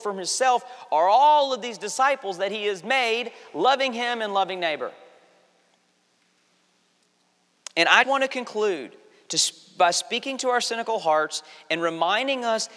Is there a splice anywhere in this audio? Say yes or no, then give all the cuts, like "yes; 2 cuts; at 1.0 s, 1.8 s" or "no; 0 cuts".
yes; 1 cut; at 8.0 s